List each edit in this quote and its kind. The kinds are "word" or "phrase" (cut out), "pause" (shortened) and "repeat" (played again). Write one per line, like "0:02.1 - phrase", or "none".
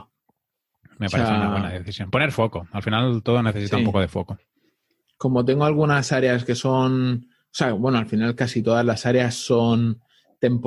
none